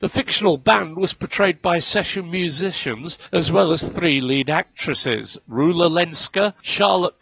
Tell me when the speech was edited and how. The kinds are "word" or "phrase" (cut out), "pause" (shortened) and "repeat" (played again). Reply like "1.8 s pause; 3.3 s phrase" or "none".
none